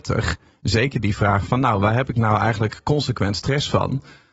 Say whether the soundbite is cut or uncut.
uncut